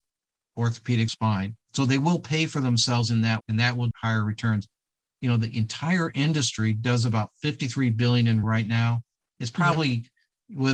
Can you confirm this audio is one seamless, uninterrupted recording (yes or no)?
no